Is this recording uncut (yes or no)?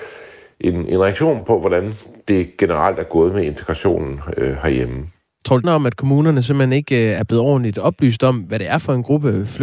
no